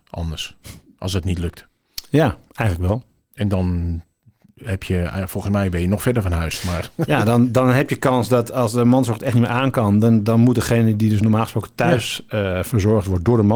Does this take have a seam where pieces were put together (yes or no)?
no